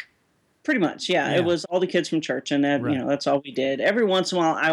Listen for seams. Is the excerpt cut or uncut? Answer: cut